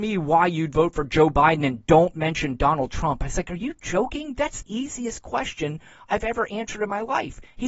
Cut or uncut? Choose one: cut